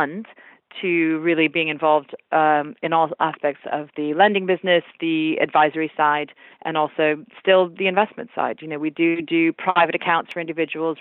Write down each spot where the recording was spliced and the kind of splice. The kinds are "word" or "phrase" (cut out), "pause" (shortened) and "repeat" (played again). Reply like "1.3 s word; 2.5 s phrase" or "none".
none